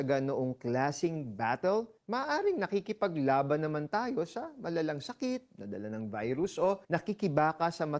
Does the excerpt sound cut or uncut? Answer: cut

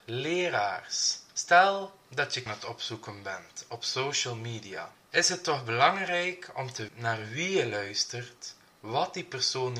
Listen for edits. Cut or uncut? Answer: cut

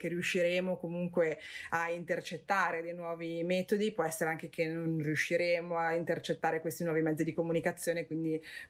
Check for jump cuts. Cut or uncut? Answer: uncut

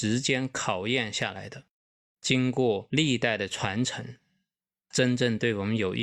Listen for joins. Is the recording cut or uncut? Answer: uncut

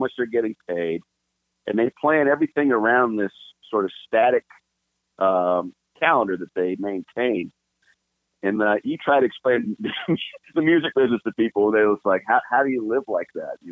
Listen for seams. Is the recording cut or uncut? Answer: uncut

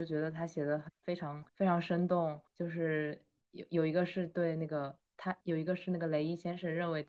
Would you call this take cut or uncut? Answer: cut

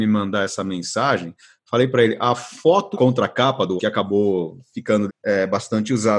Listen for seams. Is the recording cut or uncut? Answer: cut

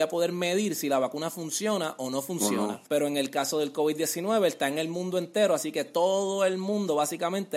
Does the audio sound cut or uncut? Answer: cut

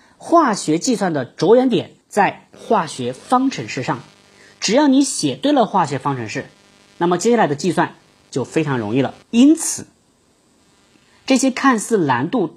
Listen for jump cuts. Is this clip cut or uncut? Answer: cut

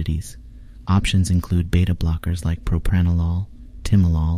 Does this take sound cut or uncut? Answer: uncut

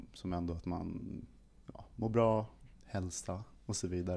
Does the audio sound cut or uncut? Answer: cut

